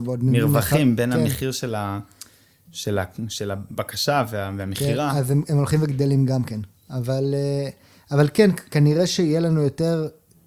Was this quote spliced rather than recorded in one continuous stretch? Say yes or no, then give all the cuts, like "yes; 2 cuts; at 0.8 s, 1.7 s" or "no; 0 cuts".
no; 0 cuts